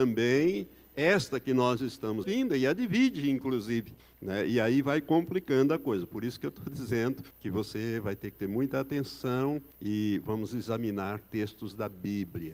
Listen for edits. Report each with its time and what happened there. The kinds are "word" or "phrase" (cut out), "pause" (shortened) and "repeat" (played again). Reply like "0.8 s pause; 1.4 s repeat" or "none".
2.2 s phrase; 4.0 s pause; 7.3 s pause; 9.7 s pause

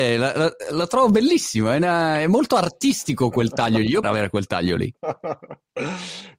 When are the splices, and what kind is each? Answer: 4.0 s phrase; 5.0 s pause

